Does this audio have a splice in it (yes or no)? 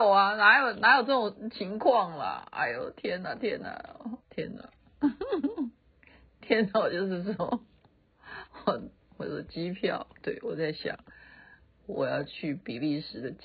yes